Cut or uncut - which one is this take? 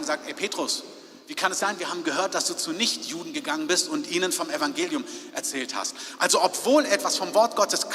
cut